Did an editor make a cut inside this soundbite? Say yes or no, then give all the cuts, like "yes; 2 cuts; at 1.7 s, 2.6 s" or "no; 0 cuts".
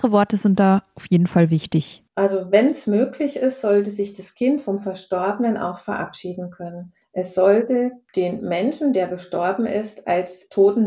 no; 0 cuts